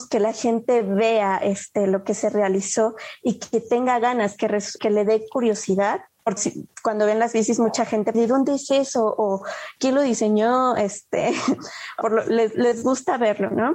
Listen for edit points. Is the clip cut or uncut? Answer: cut